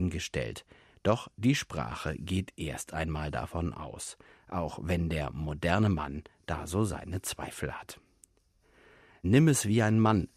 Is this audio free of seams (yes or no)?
yes